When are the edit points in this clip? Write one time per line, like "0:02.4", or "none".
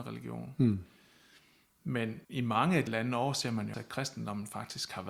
0:02.2
0:02.9
0:03.7